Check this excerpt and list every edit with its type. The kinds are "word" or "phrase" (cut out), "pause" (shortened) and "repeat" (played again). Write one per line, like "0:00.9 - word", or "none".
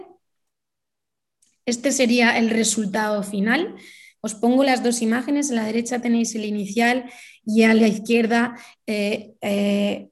none